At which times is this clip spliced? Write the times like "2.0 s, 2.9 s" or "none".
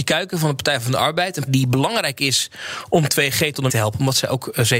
1.5 s, 3.7 s

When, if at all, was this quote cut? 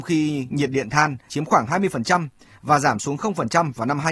1.3 s

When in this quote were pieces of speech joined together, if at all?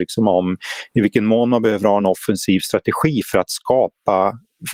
none

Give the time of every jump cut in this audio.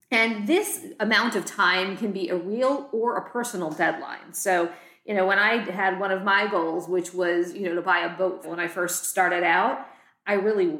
8.4 s

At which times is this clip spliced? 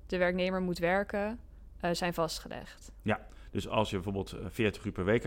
none

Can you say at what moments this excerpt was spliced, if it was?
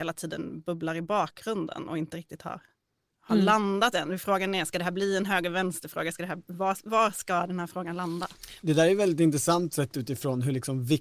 none

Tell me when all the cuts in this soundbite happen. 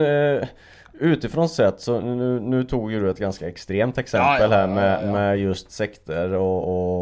none

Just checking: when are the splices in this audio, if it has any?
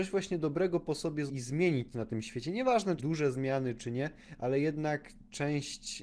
1.3 s, 1.9 s, 3.0 s

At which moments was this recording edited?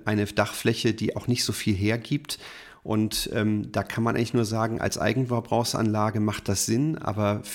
none

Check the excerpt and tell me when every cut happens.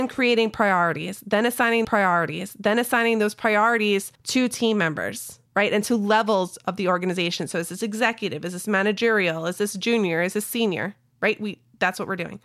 1.8 s, 4.2 s, 5.5 s

